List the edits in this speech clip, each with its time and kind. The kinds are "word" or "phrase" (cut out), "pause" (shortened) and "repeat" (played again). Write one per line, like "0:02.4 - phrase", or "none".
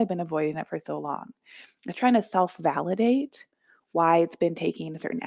none